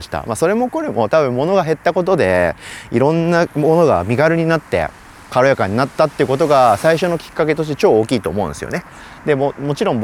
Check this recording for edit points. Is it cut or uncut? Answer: uncut